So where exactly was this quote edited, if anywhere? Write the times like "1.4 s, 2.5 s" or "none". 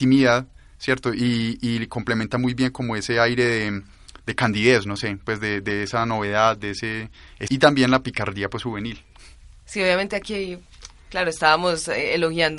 7.5 s